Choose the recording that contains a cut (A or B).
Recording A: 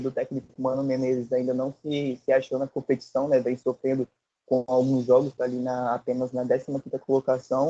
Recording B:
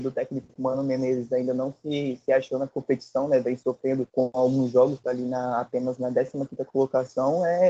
B